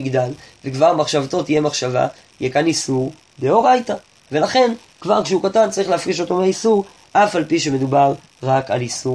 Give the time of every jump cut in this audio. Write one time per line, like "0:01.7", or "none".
none